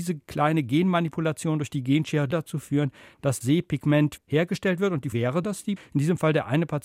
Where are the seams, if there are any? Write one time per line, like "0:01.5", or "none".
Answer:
0:02.3
0:03.4
0:04.2
0:05.1
0:05.4
0:05.8